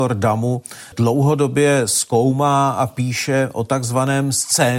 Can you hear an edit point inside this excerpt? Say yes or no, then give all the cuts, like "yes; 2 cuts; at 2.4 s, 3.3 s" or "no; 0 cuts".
no; 0 cuts